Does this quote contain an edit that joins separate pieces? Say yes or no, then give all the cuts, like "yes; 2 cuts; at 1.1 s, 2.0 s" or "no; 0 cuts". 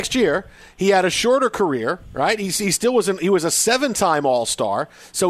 no; 0 cuts